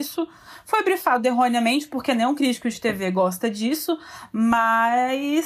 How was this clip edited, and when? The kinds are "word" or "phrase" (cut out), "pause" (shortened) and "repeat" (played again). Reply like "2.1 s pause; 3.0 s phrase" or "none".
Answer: none

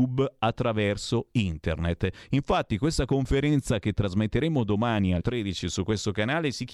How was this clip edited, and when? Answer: 5.2 s word

